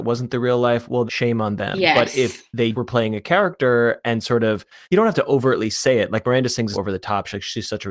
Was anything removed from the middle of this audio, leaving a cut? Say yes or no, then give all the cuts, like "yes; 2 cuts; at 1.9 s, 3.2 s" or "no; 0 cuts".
yes; 4 cuts; at 1.1 s, 2.7 s, 4.8 s, 6.7 s